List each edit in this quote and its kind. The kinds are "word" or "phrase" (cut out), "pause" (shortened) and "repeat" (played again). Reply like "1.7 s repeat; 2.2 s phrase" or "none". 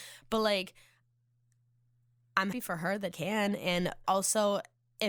2.5 s word; 3.1 s word; 4.0 s word